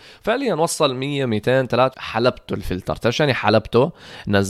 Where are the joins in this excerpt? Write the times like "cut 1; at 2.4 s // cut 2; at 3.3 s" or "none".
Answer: cut 1; at 1.9 s